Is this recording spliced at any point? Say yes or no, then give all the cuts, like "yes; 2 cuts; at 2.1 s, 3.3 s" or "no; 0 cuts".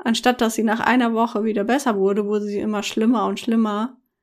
no; 0 cuts